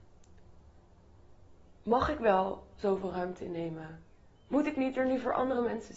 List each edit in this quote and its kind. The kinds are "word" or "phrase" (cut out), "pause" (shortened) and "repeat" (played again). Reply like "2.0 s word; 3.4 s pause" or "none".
none